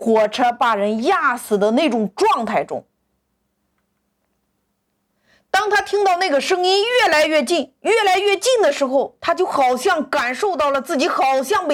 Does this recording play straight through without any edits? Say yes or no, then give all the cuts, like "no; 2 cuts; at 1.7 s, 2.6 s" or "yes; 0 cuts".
yes; 0 cuts